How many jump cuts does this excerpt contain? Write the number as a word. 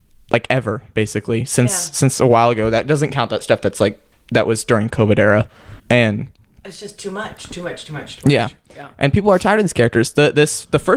one